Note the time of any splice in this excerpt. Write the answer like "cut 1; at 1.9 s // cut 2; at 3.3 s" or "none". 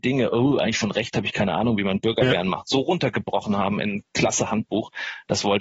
none